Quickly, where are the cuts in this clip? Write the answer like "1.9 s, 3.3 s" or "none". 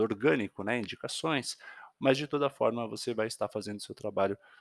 none